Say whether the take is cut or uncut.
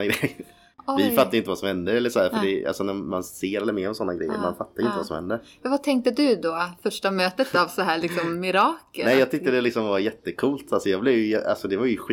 uncut